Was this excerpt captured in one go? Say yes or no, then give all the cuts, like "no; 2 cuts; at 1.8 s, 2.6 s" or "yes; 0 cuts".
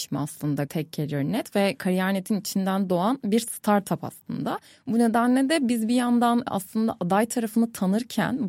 yes; 0 cuts